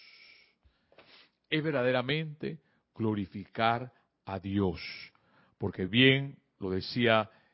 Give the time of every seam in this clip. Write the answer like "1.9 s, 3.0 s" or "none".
none